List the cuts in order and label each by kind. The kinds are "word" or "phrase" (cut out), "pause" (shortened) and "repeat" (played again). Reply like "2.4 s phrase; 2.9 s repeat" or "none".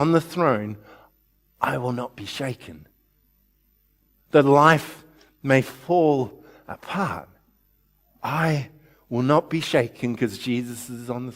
none